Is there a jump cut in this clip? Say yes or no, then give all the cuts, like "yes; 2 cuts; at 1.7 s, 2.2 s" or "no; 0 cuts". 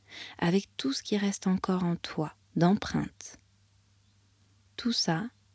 yes; 1 cut; at 2.4 s